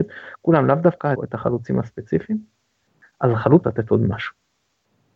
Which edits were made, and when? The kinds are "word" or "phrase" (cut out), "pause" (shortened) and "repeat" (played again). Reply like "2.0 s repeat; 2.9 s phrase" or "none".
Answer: 1.2 s word; 3.6 s word